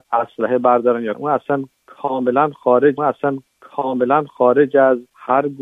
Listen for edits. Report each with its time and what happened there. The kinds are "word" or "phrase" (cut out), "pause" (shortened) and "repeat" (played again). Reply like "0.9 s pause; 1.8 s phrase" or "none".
1.1 s phrase; 3.0 s repeat

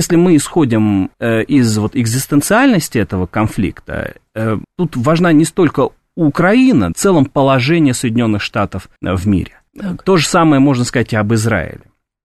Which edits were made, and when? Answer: 1.1 s pause; 4.6 s word; 6.9 s phrase; 9.0 s pause; 9.7 s pause

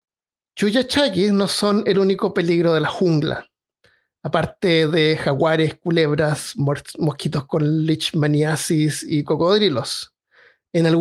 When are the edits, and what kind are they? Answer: none

